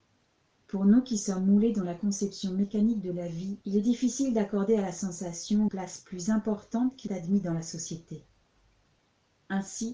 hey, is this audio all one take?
no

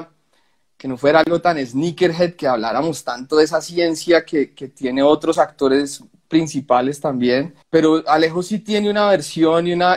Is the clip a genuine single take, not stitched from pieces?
no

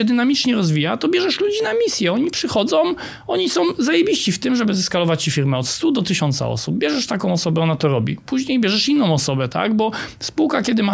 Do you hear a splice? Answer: no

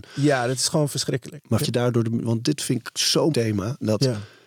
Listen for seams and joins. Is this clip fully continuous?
no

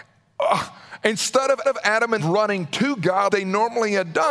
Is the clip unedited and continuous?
no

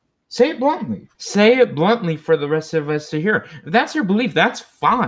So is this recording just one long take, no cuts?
no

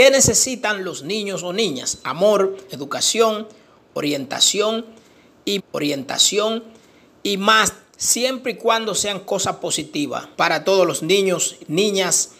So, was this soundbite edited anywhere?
yes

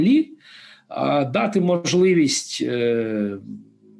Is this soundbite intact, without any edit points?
yes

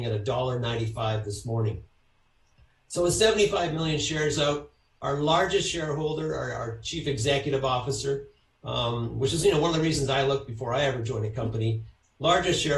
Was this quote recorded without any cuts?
yes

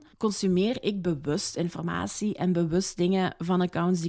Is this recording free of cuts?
yes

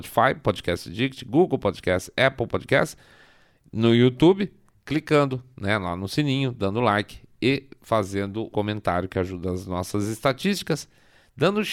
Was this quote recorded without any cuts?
no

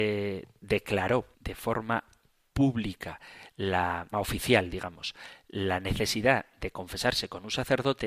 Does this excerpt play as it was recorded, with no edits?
no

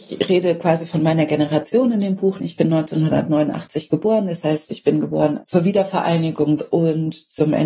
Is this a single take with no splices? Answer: no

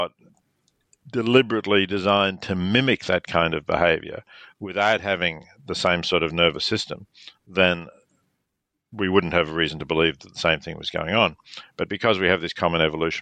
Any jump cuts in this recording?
no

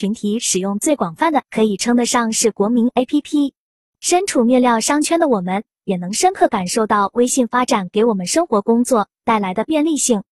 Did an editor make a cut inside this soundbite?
yes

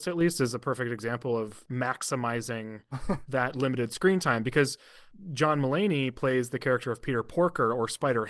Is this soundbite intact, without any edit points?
yes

